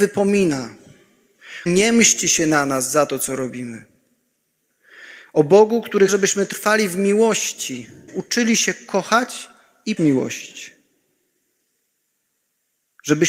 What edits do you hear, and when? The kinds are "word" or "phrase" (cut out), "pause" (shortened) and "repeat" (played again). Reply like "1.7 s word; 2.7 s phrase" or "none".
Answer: 1.7 s word; 6.1 s word; 8.1 s word; 10.0 s word